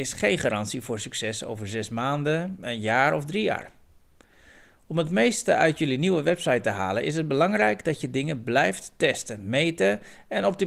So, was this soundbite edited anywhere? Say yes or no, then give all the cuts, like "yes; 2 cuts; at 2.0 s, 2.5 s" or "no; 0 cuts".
no; 0 cuts